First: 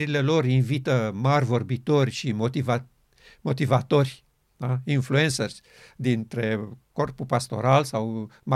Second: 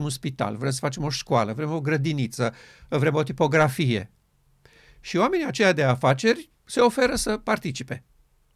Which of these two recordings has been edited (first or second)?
second